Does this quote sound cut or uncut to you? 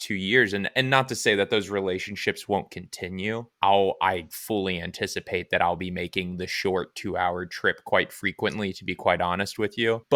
uncut